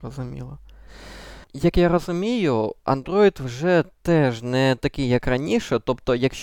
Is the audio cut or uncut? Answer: cut